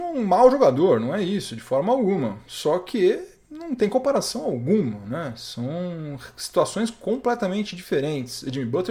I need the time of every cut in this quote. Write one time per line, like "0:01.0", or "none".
none